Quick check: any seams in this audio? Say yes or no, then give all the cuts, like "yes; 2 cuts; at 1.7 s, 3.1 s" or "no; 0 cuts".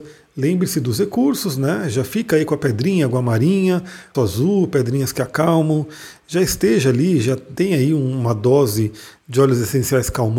yes; 1 cut; at 4.1 s